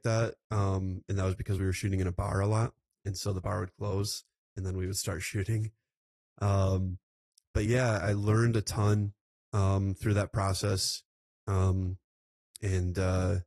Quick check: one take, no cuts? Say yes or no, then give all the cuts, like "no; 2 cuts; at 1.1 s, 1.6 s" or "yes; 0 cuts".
yes; 0 cuts